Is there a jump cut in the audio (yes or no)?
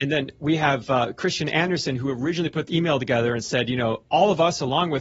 yes